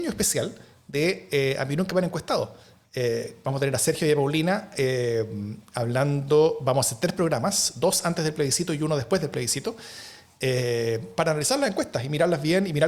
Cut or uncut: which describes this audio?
uncut